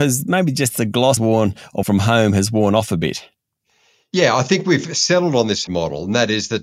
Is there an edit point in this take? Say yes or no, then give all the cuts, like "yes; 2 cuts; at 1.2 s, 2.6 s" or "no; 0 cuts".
yes; 3 cuts; at 1.2 s, 1.8 s, 5.7 s